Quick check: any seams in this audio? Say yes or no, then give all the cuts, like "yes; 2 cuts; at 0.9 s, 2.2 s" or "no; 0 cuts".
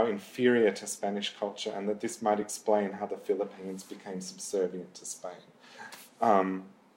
no; 0 cuts